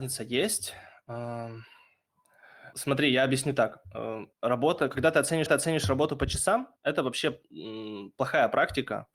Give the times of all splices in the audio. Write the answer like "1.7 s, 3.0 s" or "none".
2.7 s, 4.3 s, 5.5 s, 6.8 s